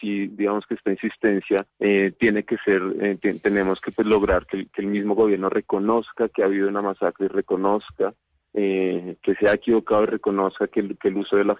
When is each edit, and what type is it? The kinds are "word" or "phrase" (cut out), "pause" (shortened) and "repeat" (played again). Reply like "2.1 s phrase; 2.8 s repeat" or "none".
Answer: 1.7 s pause